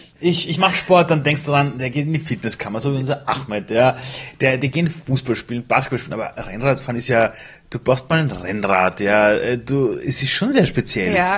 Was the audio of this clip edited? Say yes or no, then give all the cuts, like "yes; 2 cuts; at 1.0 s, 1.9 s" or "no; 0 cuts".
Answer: no; 0 cuts